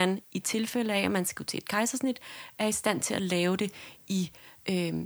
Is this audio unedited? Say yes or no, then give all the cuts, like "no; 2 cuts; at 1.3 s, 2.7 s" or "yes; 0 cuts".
yes; 0 cuts